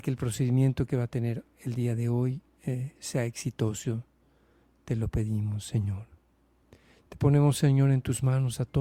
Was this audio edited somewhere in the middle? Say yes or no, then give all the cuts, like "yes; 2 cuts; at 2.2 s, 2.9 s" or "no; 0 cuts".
no; 0 cuts